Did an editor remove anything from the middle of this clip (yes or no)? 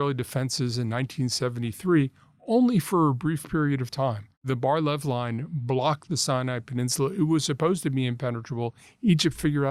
no